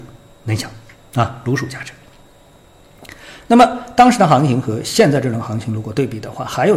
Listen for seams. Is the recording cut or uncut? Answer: uncut